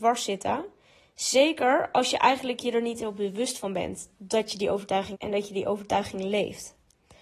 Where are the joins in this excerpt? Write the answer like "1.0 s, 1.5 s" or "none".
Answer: 5.1 s